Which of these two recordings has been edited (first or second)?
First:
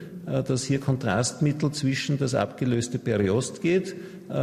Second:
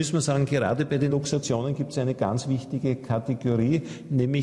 second